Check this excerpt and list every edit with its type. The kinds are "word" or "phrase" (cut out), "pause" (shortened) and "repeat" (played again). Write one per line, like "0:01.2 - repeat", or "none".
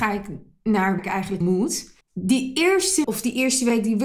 0:01.0 - word
0:01.4 - word
0:02.0 - pause
0:03.0 - word